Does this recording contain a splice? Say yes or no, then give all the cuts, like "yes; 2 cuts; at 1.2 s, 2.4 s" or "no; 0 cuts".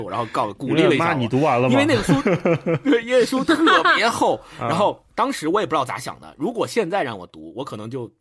yes; 1 cut; at 5.1 s